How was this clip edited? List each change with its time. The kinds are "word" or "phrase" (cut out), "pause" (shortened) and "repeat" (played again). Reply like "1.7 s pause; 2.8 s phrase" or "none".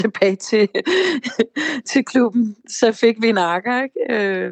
none